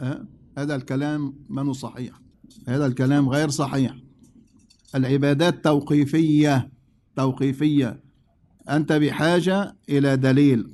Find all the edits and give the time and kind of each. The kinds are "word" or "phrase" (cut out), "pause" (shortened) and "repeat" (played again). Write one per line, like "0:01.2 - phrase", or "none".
none